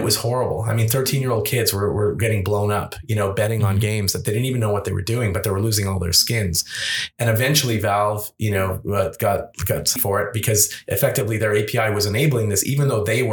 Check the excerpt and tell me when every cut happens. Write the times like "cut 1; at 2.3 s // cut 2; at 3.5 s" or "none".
cut 1; at 10.0 s